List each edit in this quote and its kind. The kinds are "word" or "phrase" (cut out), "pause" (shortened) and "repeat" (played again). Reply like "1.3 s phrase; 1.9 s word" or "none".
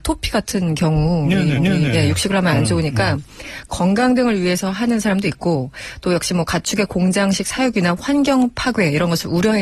1.6 s repeat

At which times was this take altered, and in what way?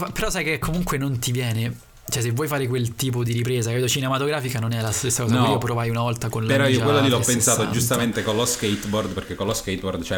none

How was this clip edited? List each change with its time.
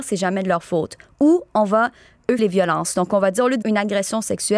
2.4 s word; 3.6 s word

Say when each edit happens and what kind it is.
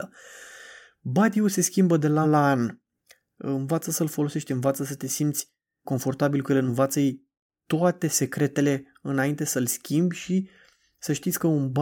2.2 s word; 5.8 s word; 6.7 s word

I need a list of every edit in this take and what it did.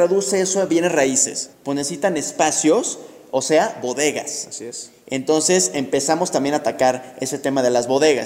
1.5 s pause

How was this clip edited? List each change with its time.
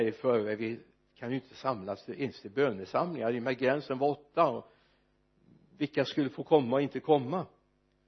none

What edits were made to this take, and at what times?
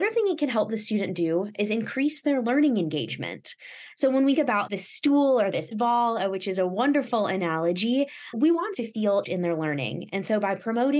4.4 s word; 4.7 s word; 5.7 s word; 8.3 s word; 8.7 s word; 9.2 s word

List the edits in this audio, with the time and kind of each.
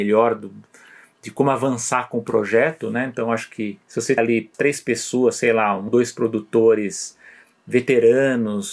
3.8 s pause; 4.2 s word; 4.5 s word; 5.9 s word

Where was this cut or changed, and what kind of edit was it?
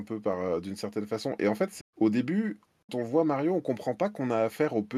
1.8 s phrase; 2.9 s word

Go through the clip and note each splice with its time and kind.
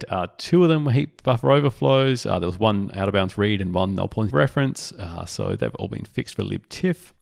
4.3 s word

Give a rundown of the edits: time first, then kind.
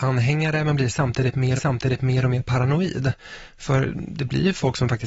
1.6 s repeat

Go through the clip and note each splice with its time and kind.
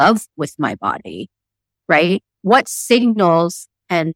none

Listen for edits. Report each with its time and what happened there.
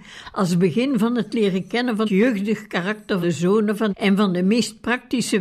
2.0 s word; 3.2 s word; 3.9 s word

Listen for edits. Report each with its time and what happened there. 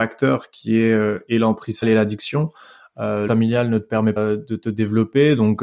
1.8 s word; 3.3 s word; 4.2 s word

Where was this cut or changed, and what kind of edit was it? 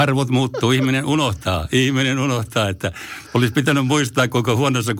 none

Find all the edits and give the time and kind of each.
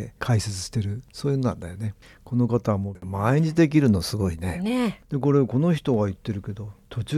none

